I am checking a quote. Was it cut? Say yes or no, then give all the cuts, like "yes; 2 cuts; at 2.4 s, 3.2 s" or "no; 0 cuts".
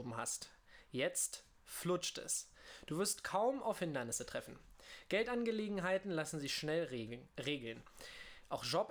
no; 0 cuts